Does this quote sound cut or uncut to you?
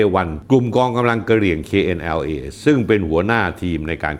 uncut